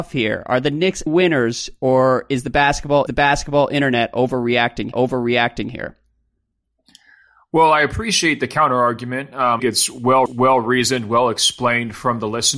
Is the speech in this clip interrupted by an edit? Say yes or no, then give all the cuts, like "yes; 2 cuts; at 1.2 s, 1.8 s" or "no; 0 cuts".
yes; 5 cuts; at 1.1 s, 3.1 s, 4.9 s, 9.6 s, 10.3 s